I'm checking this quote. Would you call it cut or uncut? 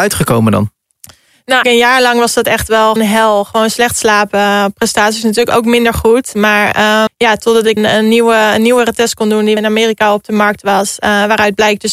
cut